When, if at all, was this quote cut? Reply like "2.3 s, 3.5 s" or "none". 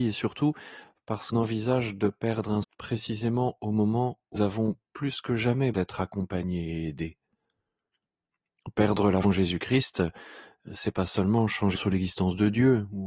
1.3 s, 2.6 s, 4.4 s, 5.7 s, 9.2 s, 11.7 s